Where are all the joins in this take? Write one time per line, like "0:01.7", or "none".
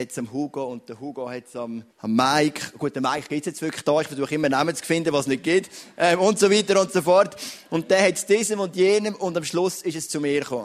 0:01.9